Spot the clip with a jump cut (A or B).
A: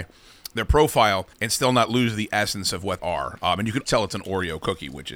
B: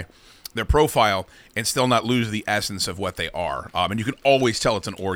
A